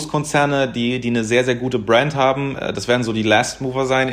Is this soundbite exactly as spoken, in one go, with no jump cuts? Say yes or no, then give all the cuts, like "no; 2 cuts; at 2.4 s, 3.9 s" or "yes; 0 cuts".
yes; 0 cuts